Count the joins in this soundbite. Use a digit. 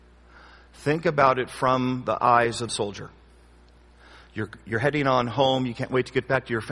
1